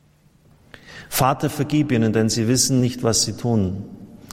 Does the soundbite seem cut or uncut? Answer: uncut